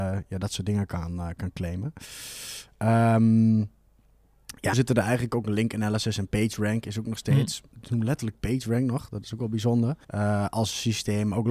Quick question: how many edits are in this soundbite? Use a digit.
3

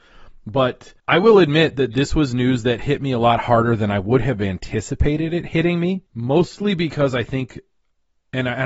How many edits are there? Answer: 2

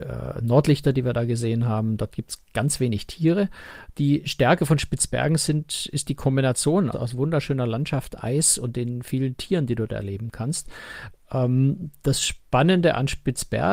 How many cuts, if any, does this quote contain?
1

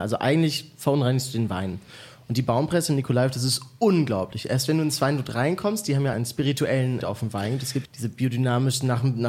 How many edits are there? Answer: 3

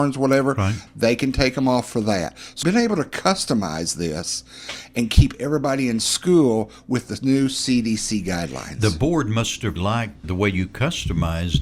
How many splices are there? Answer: 3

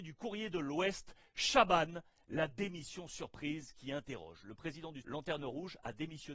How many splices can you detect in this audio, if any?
1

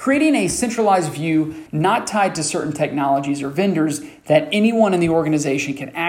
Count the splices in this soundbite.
1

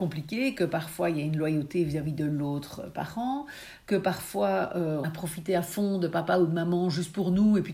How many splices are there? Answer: 1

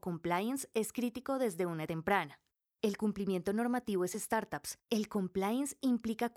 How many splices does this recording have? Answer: 2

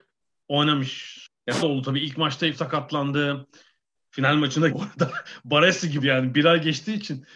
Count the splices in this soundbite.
4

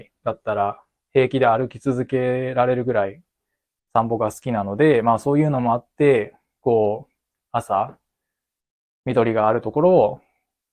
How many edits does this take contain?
0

